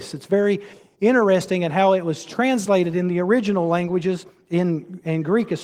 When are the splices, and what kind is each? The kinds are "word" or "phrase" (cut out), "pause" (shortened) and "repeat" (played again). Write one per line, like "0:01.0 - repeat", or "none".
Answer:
none